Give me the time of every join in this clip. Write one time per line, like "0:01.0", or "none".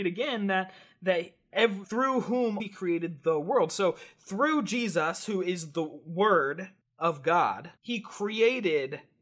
0:01.8
0:02.6
0:06.8
0:07.8

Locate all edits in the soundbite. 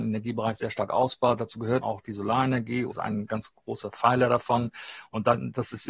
0:01.8
0:02.9

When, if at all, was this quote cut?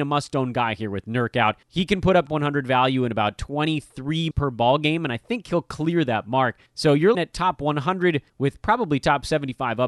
0:01.6
0:02.3
0:04.3
0:06.7
0:07.1
0:08.3

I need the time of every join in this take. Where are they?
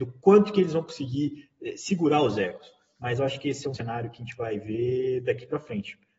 none

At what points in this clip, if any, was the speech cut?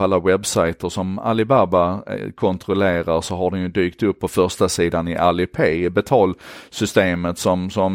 none

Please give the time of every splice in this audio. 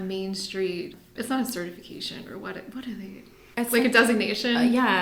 none

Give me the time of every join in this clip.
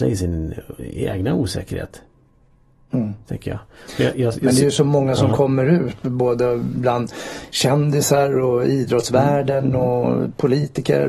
none

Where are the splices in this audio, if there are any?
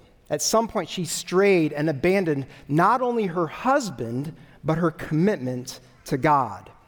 none

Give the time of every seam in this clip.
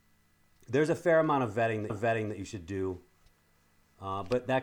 0:01.9

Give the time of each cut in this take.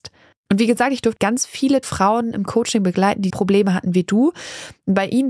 0:01.2
0:01.8
0:03.3

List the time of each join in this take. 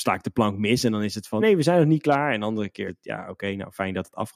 0:01.4
0:02.9

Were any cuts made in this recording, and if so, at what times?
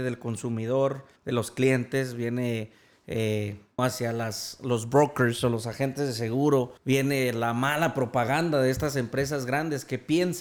0:01.2
0:03.8
0:06.8

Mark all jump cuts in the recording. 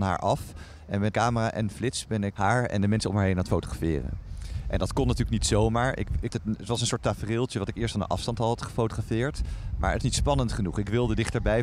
0:01.1
0:02.3
0:06.3
0:10.0

